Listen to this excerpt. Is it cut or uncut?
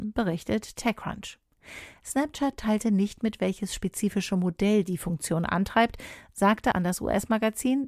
cut